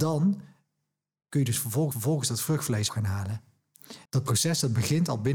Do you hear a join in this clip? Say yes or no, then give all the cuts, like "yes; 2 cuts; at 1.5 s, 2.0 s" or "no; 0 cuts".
yes; 3 cuts; at 1.9 s, 2.9 s, 4.1 s